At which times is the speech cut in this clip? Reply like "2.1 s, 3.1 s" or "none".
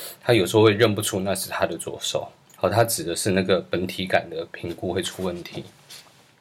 2.5 s